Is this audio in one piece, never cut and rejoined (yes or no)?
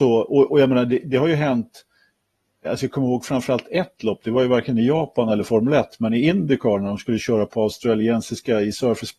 yes